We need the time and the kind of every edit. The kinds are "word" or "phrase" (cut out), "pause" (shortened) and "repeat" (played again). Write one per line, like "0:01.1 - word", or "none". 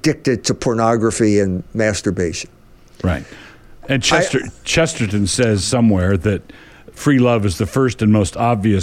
none